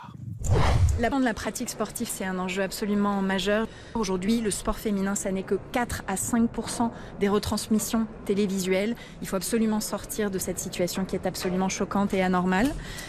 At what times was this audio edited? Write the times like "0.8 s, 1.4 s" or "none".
1.1 s, 2.1 s